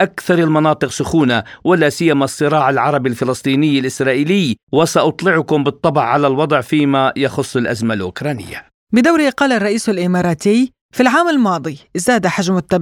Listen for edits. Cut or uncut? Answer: cut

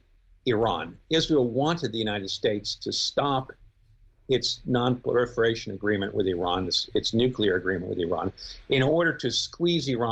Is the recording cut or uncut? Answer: uncut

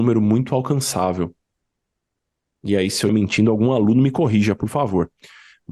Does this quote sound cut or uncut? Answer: cut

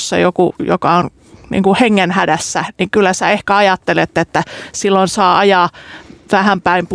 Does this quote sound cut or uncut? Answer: uncut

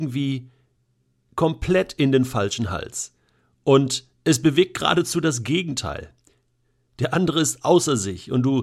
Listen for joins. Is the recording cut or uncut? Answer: uncut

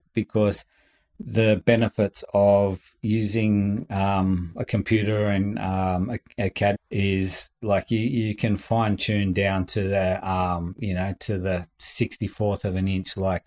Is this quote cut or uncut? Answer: cut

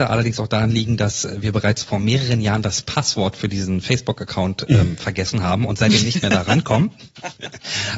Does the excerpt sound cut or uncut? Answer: uncut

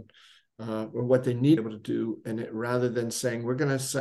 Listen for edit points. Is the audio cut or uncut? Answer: cut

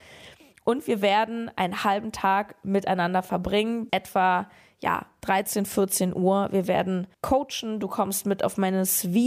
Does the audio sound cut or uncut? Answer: cut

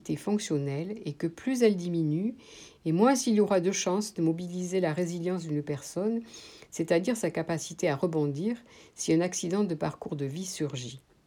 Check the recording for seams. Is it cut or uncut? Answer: uncut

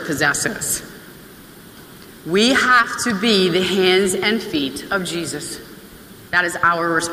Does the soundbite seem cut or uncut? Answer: uncut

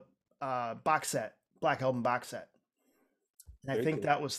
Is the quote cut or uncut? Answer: uncut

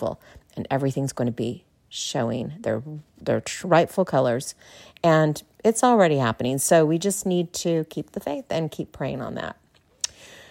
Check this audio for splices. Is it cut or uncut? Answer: uncut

